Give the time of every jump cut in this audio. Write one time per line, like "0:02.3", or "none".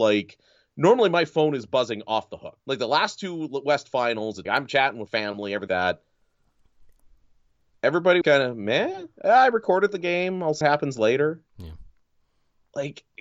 0:02.6
0:04.5
0:05.1
0:05.7
0:08.2
0:10.6
0:11.5